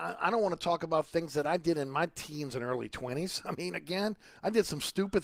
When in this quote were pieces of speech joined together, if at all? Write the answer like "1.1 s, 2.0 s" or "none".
none